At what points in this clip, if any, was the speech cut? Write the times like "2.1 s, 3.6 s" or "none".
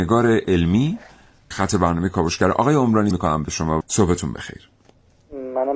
1.5 s, 3.1 s, 3.8 s